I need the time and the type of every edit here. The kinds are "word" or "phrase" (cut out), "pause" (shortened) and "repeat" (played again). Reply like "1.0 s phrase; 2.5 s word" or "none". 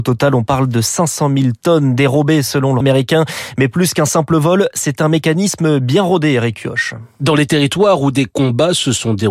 2.8 s word